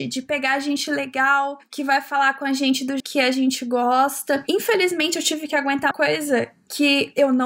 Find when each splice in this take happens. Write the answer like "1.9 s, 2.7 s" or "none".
3.0 s, 5.9 s